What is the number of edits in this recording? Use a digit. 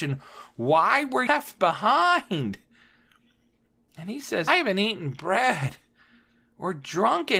2